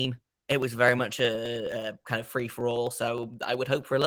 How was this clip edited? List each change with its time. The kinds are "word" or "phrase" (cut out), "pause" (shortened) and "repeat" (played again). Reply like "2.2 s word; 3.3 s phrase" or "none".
none